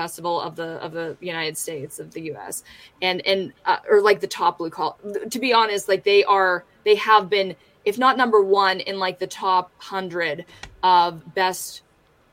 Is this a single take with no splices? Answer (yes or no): yes